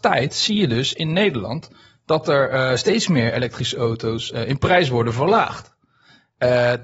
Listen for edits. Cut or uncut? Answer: uncut